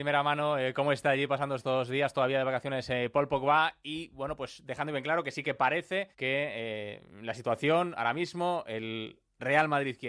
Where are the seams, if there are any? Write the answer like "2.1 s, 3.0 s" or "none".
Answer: 6.1 s